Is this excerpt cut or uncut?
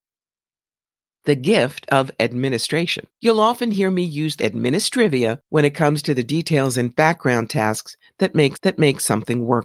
cut